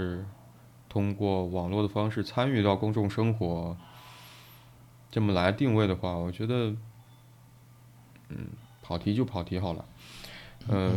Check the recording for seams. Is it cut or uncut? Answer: uncut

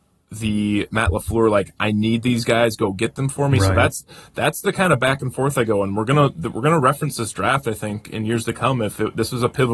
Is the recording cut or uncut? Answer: uncut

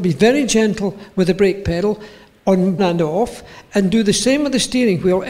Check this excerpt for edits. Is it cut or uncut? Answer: cut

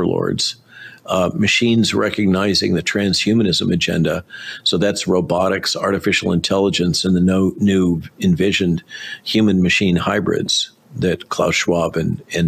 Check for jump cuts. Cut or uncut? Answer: uncut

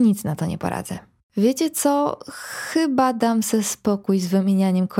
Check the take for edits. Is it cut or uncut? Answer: uncut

